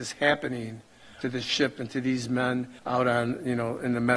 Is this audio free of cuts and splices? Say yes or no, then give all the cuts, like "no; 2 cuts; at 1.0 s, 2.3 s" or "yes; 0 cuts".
no; 2 cuts; at 1.2 s, 2.8 s